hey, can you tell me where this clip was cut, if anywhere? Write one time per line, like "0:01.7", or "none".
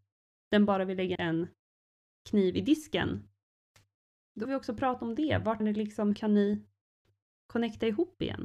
0:01.2
0:04.4
0:05.6
0:06.1